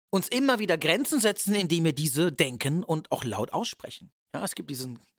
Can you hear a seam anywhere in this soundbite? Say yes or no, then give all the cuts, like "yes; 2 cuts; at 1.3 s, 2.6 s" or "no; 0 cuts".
yes; 1 cut; at 4.2 s